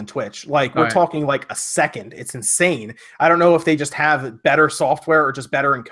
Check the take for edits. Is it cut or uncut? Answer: uncut